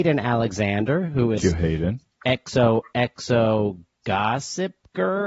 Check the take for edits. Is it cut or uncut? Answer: cut